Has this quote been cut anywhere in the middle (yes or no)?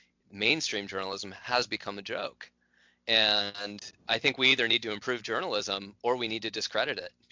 yes